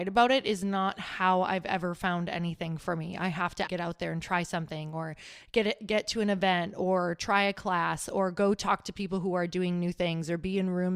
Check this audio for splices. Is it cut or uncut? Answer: cut